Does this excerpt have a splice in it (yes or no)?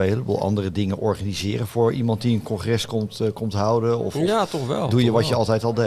no